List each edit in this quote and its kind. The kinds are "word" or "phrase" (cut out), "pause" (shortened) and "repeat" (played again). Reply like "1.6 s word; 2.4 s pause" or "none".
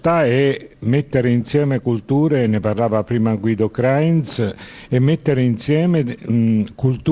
none